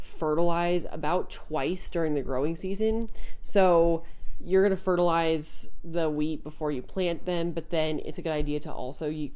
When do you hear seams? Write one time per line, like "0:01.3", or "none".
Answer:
none